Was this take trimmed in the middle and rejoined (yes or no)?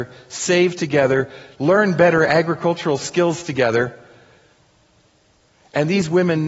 no